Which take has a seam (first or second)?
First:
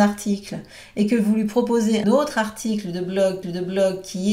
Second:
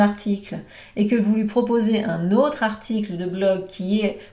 first